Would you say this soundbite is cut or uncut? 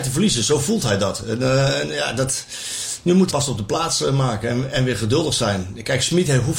cut